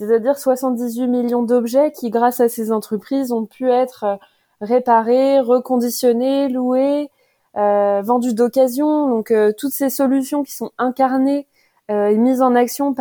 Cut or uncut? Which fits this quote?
uncut